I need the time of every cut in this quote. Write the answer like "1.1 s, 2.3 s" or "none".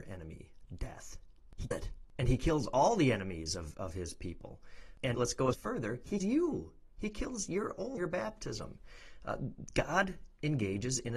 1.7 s, 3.7 s, 5.1 s, 5.5 s, 6.2 s, 8.0 s